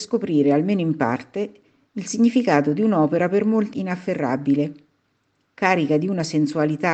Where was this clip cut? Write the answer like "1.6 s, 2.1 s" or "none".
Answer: 3.7 s